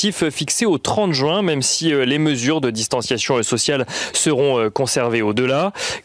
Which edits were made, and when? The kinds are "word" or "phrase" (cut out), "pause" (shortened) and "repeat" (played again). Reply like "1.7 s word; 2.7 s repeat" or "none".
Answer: none